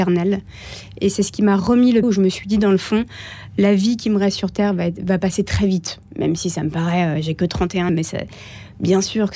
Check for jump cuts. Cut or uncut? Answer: cut